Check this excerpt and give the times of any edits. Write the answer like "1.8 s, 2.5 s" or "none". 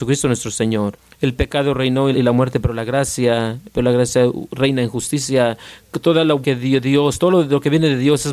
2.1 s, 6.4 s